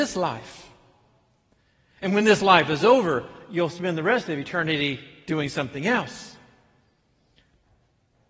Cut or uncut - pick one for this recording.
uncut